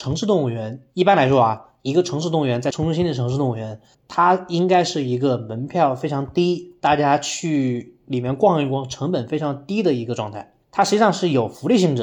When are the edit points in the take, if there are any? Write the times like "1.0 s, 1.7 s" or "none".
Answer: 3.9 s, 10.6 s

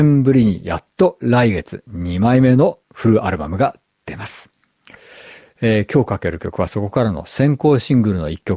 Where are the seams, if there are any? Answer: 2.8 s

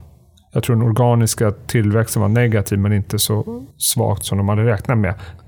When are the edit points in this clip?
3.7 s

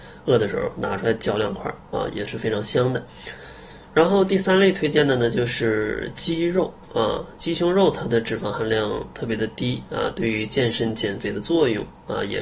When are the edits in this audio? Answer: none

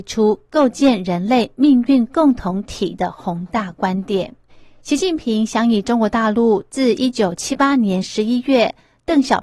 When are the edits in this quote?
4.5 s

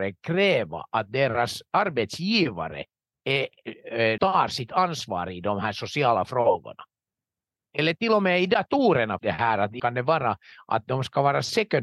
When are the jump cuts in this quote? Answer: 4.2 s, 9.2 s, 9.8 s

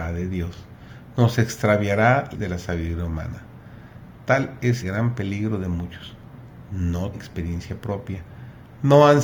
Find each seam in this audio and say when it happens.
2.3 s, 4.8 s, 7.1 s

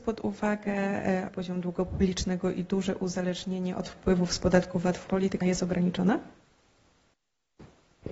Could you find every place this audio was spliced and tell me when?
1.3 s, 5.1 s, 5.4 s

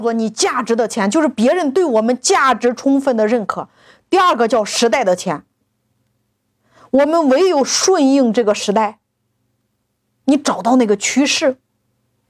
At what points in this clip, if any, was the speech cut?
none

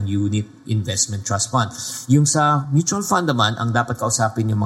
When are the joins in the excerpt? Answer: none

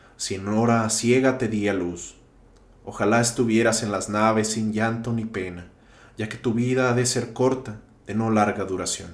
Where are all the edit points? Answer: none

